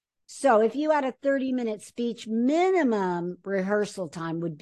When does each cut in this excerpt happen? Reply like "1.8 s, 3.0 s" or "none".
none